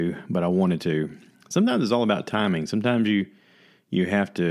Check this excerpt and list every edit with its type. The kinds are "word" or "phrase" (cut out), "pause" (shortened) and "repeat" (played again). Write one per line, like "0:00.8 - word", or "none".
0:01.3 - pause